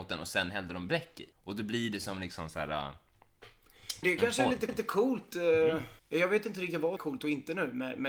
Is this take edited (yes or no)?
yes